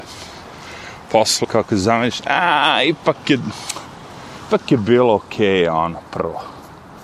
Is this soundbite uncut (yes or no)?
no